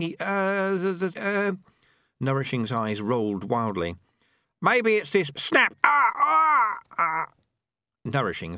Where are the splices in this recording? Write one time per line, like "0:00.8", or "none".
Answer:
0:01.1
0:05.3
0:06.9